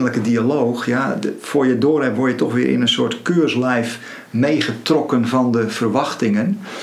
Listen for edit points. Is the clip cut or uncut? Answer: uncut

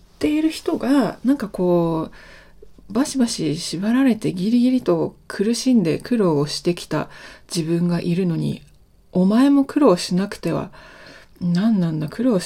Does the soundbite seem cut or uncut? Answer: uncut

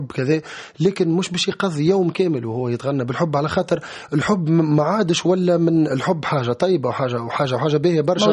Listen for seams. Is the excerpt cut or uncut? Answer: uncut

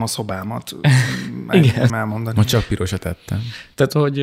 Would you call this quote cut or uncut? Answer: cut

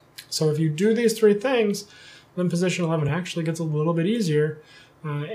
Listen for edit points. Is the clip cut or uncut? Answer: uncut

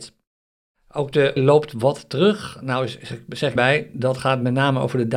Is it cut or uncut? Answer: cut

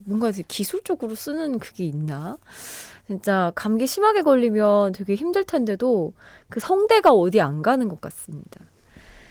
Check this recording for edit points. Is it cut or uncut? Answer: uncut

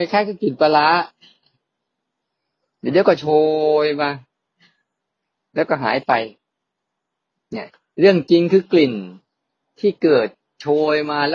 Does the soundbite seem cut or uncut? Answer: uncut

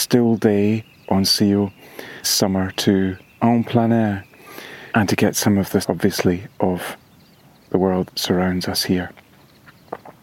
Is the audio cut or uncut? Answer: cut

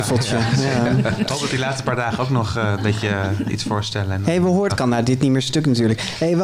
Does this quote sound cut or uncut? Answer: cut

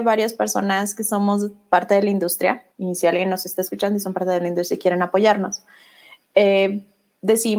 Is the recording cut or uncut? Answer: cut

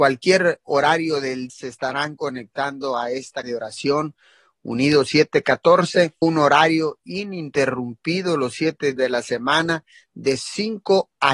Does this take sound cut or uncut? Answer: cut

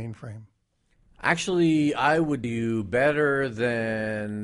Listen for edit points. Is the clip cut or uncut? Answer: cut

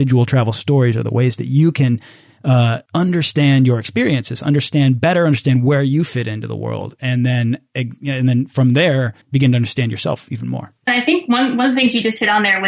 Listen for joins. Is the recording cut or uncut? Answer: cut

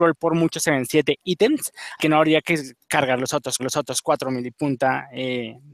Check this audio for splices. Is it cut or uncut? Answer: cut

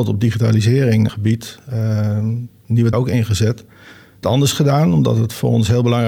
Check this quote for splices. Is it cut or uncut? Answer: cut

